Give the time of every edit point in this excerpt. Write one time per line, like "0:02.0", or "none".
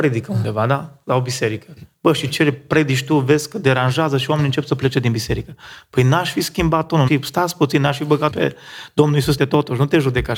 0:07.1
0:08.3
0:09.4

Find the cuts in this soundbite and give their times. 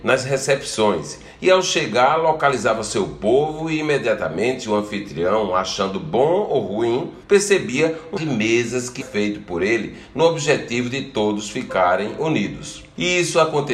0:07.2
0:08.2
0:09.0

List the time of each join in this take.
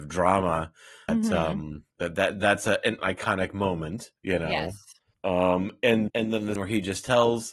0:01.1
0:01.9
0:03.0
0:04.2
0:05.1
0:06.1
0:06.6

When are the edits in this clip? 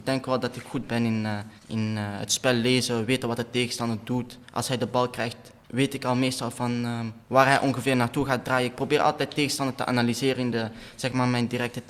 0:01.6
0:04.4
0:05.6
0:07.2

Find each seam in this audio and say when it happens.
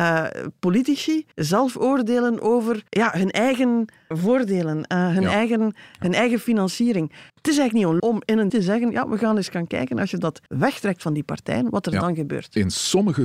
0:01.3
0:02.9
0:04.1
0:07.3
0:08.0
0:08.5
0:10.5

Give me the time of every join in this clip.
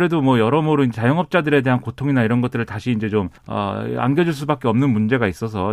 0:03.4

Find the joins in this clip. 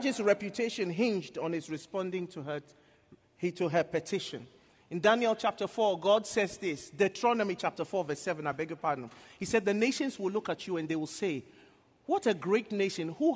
none

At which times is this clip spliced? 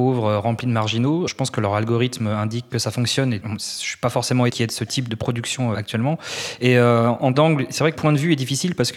0:01.3
0:02.7
0:03.4
0:04.5
0:05.1
0:05.7
0:07.3
0:08.0

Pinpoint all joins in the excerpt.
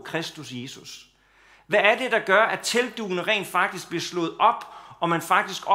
none

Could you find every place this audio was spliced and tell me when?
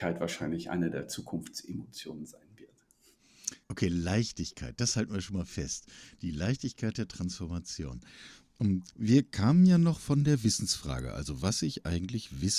0:03.6

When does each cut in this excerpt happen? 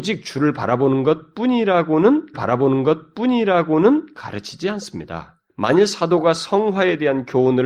0:02.3
0:05.5

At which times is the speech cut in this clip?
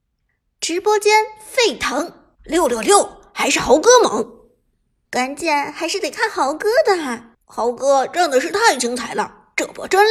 0:02.3
0:07.4

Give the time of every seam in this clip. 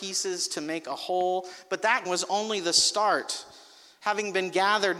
0:02.0

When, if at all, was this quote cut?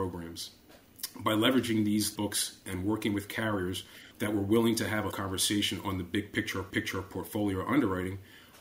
0:02.2
0:04.1
0:05.1
0:06.7

